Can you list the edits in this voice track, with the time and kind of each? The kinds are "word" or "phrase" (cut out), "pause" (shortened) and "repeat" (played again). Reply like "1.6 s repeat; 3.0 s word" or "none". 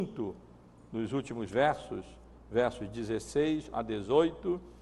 none